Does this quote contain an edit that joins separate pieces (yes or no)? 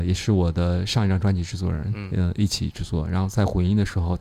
no